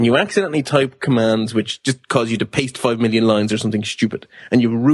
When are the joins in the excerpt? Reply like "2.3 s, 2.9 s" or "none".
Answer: none